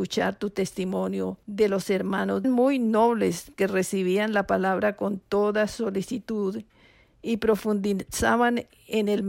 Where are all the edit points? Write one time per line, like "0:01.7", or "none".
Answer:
0:01.4
0:02.4
0:03.6